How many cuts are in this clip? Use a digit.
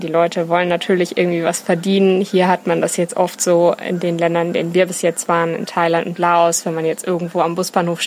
0